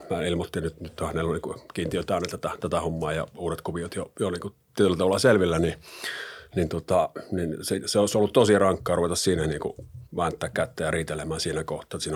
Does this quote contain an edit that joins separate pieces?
yes; 1 cut; at 10.1 s

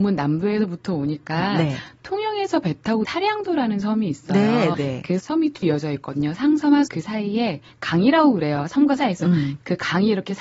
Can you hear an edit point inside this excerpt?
yes; 6 cuts; at 3.0 s, 4.7 s, 5.2 s, 5.6 s, 6.9 s, 9.0 s

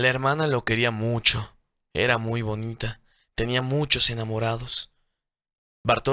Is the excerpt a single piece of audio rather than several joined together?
yes; 0 cuts

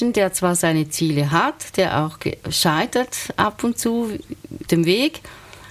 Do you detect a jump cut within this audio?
yes; 1 cut; at 4.7 s

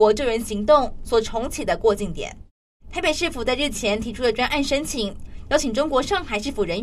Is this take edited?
yes; 1 cut; at 2.6 s

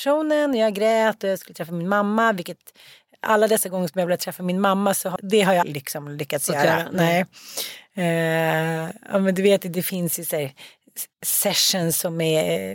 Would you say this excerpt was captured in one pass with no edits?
no; 3 cuts; at 5.2 s, 5.6 s, 11.1 s

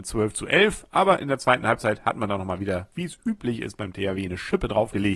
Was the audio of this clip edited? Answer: no; 0 cuts

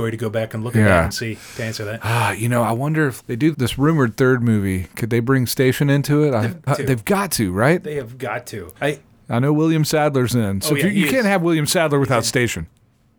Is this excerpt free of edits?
no; 4 cuts; at 3.2 s, 3.5 s, 6.7 s, 8.8 s

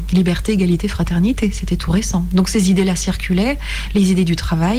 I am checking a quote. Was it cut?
no; 0 cuts

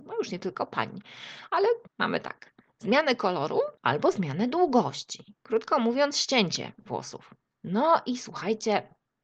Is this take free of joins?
no; 3 cuts; at 1.9 s, 3.8 s, 7.4 s

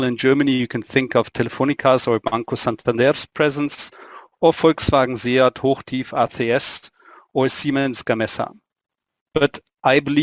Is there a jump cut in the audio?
no; 0 cuts

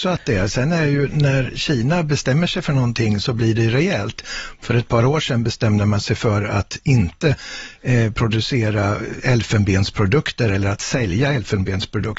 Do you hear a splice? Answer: no; 0 cuts

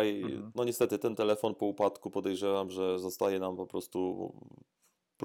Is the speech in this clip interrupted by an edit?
no; 0 cuts

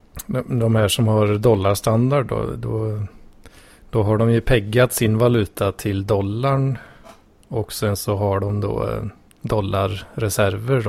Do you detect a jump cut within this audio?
no; 0 cuts

